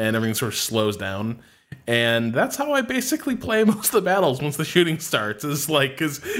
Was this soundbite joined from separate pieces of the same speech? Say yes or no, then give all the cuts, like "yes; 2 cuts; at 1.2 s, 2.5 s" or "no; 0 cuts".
no; 0 cuts